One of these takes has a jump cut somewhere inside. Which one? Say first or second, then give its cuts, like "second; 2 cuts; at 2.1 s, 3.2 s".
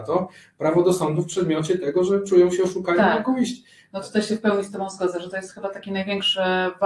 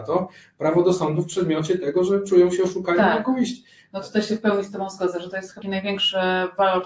second; 1 cut; at 5.6 s